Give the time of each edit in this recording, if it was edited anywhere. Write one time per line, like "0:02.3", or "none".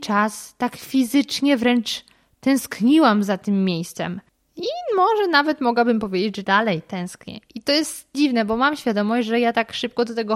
0:06.4
0:08.1